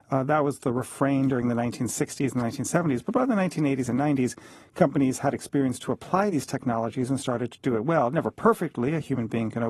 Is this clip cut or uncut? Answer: uncut